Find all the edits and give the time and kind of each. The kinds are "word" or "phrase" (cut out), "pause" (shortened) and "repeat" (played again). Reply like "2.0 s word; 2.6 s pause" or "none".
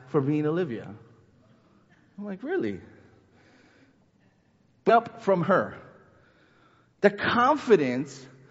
4.9 s phrase